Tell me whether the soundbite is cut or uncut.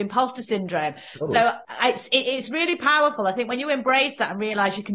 uncut